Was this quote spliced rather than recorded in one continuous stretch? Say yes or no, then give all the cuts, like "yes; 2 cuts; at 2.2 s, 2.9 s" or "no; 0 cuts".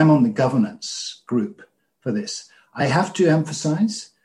no; 0 cuts